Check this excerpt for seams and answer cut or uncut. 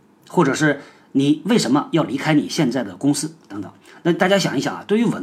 uncut